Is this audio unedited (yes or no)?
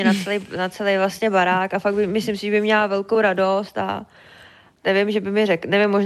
yes